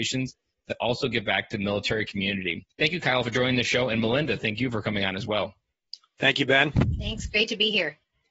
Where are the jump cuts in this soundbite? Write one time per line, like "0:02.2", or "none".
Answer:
0:02.7